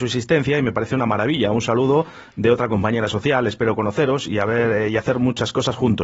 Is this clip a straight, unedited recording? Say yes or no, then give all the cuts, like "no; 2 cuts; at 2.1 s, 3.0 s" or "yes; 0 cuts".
yes; 0 cuts